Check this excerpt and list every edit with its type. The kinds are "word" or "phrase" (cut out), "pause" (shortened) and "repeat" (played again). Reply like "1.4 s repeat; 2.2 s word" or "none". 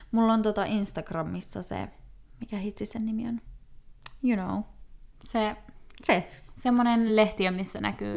none